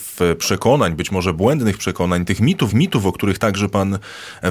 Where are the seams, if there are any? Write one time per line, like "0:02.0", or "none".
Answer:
0:02.7